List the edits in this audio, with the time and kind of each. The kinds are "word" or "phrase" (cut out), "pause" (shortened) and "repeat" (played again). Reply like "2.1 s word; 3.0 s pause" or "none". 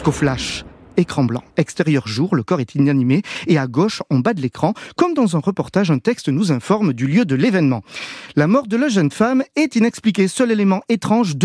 1.5 s pause